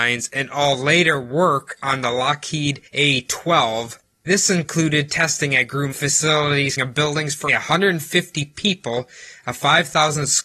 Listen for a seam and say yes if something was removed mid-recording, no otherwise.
yes